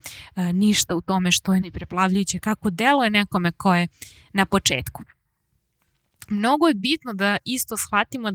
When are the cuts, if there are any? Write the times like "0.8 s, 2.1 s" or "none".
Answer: 1.6 s